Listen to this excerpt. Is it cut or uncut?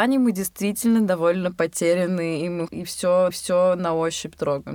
cut